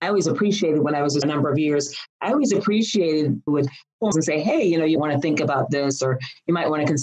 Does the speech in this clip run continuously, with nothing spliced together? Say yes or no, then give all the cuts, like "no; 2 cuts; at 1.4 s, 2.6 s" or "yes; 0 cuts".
no; 4 cuts; at 1.2 s, 3.5 s, 4.1 s, 5.0 s